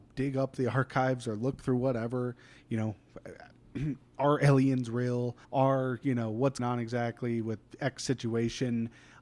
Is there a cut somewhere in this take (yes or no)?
yes